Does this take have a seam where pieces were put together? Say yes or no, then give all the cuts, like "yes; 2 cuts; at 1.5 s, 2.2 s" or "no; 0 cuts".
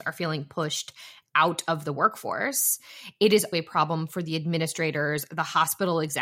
yes; 1 cut; at 3.5 s